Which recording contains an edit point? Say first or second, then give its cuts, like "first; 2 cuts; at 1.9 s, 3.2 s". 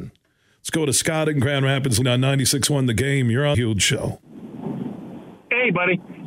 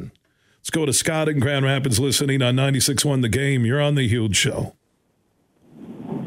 first; 3 cuts; at 2.0 s, 3.5 s, 4.2 s